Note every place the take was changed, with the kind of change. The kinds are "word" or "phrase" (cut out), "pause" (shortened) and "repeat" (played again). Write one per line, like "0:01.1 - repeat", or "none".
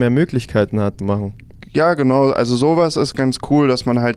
0:01.0 - phrase